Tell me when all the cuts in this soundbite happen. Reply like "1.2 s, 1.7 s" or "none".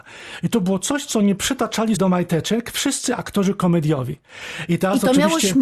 2.0 s